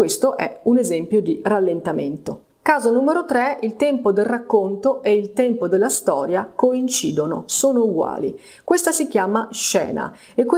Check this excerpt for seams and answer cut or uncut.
uncut